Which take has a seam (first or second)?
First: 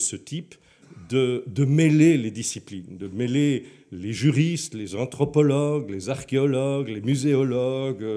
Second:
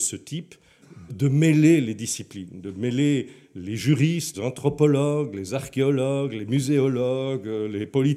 second